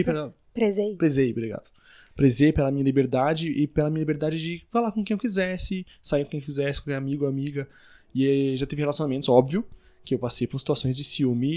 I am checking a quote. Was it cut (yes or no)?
no